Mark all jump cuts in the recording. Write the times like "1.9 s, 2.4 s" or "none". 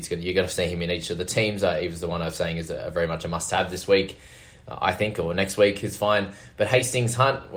none